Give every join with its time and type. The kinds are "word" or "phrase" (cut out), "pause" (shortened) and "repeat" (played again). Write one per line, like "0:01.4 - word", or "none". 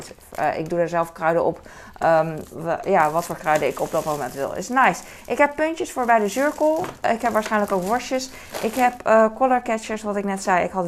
none